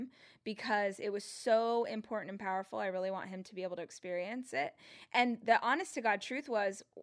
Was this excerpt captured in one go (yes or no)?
yes